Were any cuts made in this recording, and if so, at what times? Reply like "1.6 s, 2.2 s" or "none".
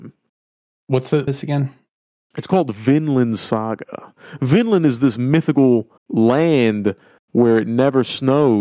1.3 s, 6.0 s